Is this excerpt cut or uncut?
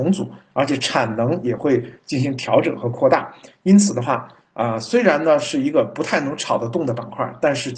uncut